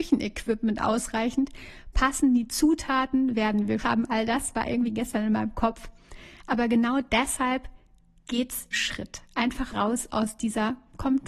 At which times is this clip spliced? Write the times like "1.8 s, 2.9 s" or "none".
3.8 s, 8.7 s, 9.7 s